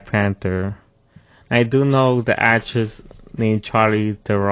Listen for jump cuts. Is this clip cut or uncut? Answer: uncut